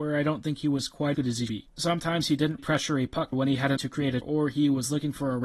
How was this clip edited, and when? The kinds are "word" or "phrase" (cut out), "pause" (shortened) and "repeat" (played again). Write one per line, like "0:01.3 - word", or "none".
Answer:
0:01.1 - word
0:01.5 - word
0:02.6 - word
0:03.3 - word
0:03.8 - word
0:04.2 - word